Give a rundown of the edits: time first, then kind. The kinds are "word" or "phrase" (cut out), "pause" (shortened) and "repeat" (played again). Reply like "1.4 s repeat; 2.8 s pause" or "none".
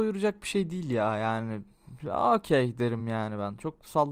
none